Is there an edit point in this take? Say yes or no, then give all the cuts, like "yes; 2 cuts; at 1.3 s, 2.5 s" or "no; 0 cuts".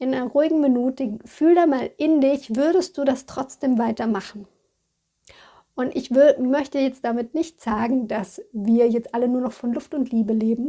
no; 0 cuts